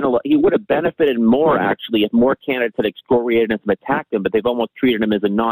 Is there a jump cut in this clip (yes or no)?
no